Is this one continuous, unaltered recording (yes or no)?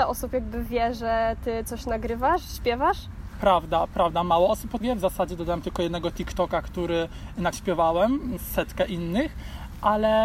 no